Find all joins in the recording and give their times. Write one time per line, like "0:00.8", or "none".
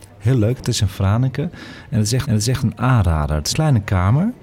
0:02.2
0:03.5